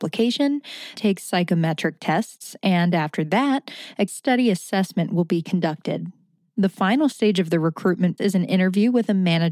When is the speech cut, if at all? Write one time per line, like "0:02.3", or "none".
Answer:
0:01.0
0:04.1
0:08.2

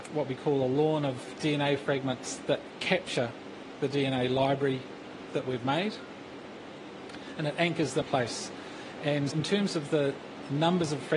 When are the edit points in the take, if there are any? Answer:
0:08.0
0:09.3

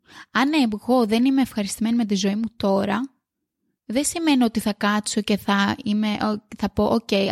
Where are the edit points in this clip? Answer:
none

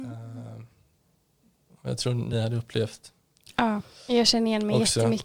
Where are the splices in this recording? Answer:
none

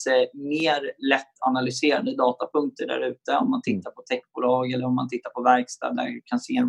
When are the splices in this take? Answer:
none

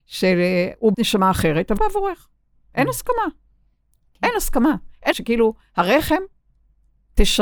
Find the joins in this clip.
0:00.9
0:01.8
0:05.1

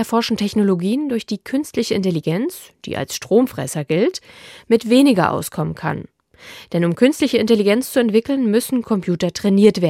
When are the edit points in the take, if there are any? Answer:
none

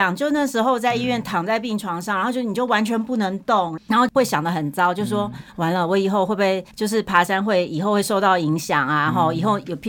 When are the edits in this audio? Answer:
0:06.7

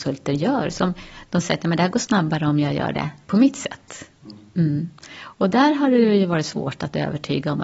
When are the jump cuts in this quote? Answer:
none

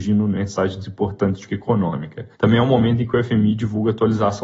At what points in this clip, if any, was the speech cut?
0:01.5
0:02.3

